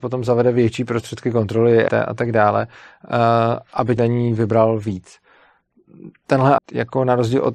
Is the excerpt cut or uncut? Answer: cut